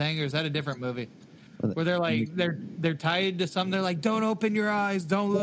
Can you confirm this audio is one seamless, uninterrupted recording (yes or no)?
yes